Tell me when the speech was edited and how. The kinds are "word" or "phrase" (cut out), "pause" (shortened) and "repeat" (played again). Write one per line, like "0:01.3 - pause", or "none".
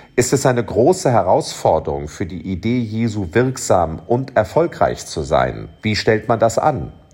0:05.8 - pause